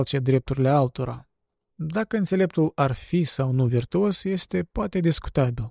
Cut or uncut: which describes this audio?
uncut